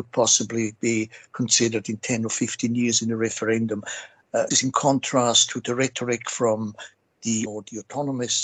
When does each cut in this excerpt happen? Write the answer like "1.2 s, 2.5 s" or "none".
4.5 s, 7.5 s